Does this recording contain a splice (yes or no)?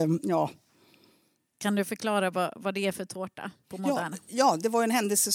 no